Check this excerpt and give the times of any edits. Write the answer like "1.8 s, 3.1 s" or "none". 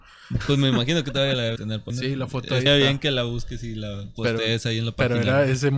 1.6 s, 1.9 s, 2.7 s